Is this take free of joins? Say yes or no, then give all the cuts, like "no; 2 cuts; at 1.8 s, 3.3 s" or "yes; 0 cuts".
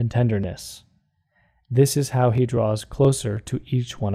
yes; 0 cuts